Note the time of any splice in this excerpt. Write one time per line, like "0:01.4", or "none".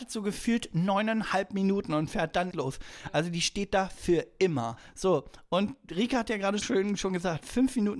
0:02.5
0:06.6